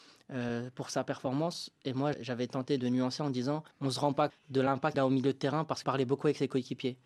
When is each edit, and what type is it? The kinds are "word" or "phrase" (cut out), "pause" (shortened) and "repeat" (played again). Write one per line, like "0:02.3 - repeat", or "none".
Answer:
0:02.1 - word
0:03.7 - pause
0:04.3 - word
0:04.9 - word
0:05.8 - word